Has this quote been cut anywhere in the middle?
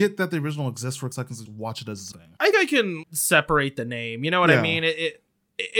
yes; 5 cuts; at 1.1 s, 1.5 s, 2.1 s, 2.5 s, 3.0 s

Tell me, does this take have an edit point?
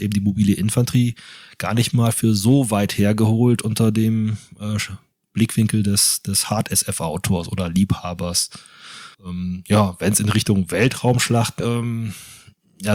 yes; 2 cuts; at 9.1 s, 11.6 s

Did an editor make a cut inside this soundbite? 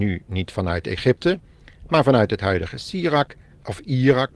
no; 0 cuts

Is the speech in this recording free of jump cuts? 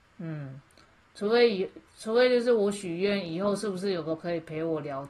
no; 1 cut; at 4.2 s

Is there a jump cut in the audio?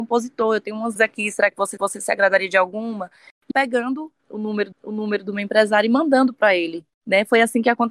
yes; 5 cuts; at 1.0 s, 1.8 s, 3.5 s, 4.7 s, 6.9 s

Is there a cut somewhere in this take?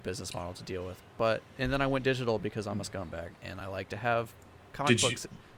no; 0 cuts

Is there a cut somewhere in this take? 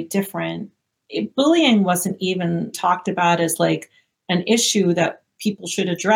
yes; 1 cut; at 2.7 s

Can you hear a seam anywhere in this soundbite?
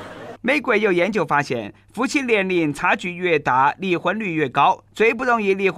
yes; 1 cut; at 4.9 s

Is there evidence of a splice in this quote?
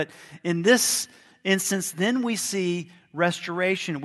no; 0 cuts

